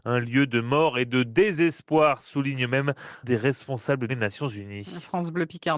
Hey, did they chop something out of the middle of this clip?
yes; 2 cuts; at 3.2 s, 4.1 s

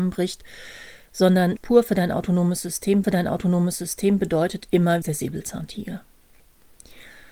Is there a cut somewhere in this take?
yes; 3 cuts; at 1.6 s, 3.0 s, 5.0 s

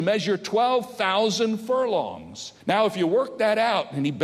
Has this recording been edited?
yes; 1 cut; at 2.6 s

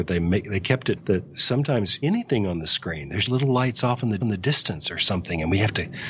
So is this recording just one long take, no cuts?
no; 4 cuts; at 1.0 s, 2.0 s, 3.3 s, 4.2 s

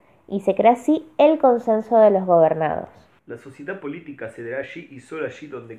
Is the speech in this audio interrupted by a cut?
no; 0 cuts

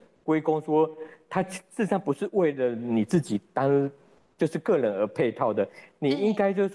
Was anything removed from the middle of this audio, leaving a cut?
no; 0 cuts

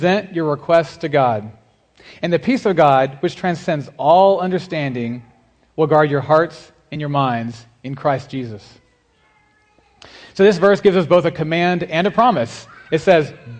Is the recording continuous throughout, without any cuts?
yes; 0 cuts

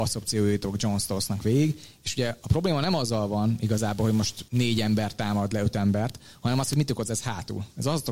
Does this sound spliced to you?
yes; 1 cut; at 4.5 s

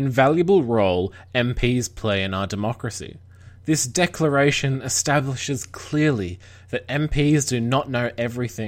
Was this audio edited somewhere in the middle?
no; 0 cuts

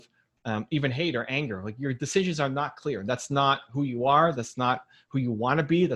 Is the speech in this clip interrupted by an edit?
no; 0 cuts

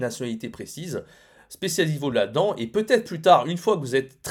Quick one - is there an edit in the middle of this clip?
no; 0 cuts

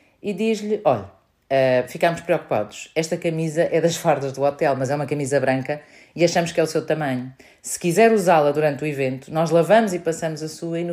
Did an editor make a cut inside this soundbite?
no; 0 cuts

